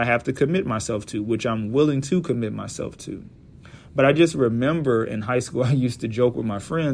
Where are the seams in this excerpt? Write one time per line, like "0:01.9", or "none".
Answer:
none